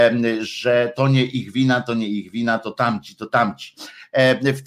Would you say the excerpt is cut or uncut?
uncut